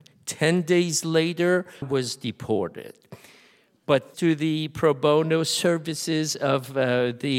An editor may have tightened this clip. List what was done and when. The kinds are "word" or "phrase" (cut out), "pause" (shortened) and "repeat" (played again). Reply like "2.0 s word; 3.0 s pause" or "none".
1.8 s word; 4.1 s word